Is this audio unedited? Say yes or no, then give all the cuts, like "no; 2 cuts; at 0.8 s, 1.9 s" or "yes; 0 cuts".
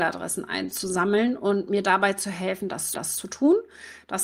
no; 1 cut; at 2.9 s